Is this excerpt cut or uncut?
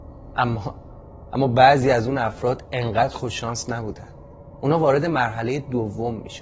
uncut